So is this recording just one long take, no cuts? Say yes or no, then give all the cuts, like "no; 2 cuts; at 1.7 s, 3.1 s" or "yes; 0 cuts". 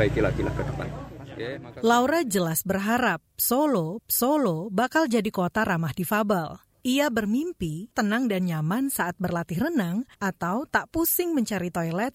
no; 3 cuts; at 4.0 s, 7.9 s, 10.1 s